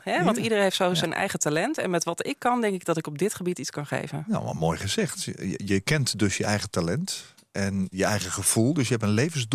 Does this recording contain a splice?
yes; 1 cut; at 7.9 s

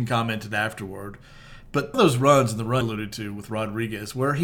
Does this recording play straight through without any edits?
no; 2 cuts; at 1.9 s, 2.8 s

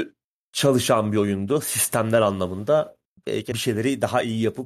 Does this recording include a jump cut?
yes; 1 cut; at 3.5 s

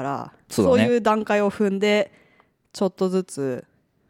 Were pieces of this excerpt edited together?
no; 0 cuts

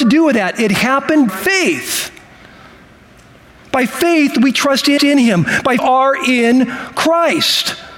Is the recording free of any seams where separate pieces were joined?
no; 3 cuts; at 1.3 s, 5.0 s, 5.8 s

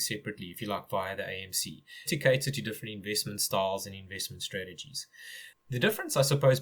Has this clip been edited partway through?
yes; 1 cut; at 2.1 s

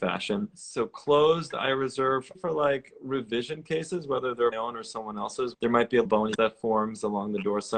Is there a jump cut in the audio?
yes; 5 cuts; at 2.4 s, 4.5 s, 5.5 s, 6.1 s, 6.4 s

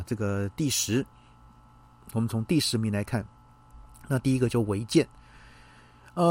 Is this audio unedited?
yes; 0 cuts

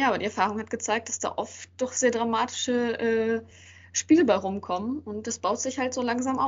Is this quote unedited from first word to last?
yes; 0 cuts

